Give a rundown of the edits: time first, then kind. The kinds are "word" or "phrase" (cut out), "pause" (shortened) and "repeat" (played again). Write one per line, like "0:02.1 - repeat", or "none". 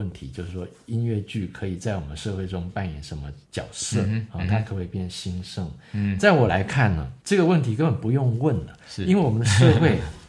0:03.4 - pause
0:07.2 - pause

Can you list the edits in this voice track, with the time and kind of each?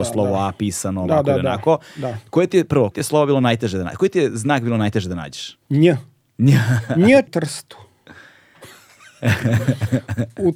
0:02.9 - word
0:05.6 - pause
0:07.3 - phrase

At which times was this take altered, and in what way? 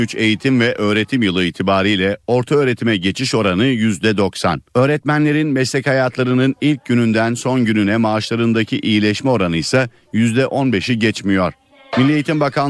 0:04.7 - pause

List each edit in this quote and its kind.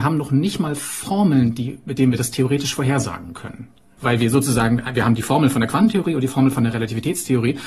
none

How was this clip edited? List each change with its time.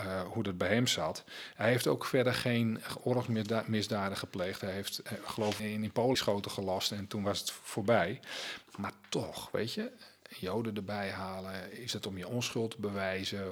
0:05.6 - word
0:06.1 - phrase

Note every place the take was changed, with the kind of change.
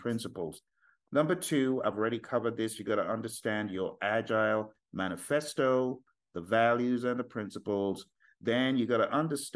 none

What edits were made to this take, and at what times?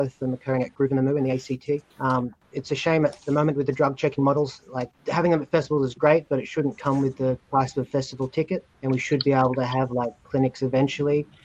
0:01.9 - pause
0:05.0 - pause
0:08.7 - pause

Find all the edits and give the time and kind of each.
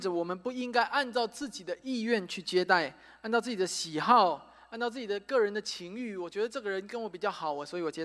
none

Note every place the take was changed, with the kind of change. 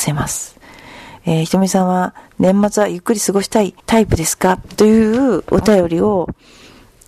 0:03.8 - pause

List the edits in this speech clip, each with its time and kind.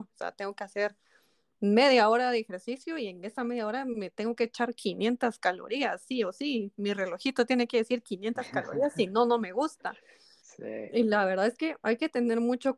none

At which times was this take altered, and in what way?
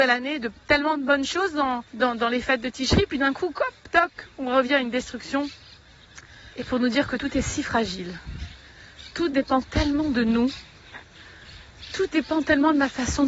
0:01.9 - pause
0:06.5 - pause

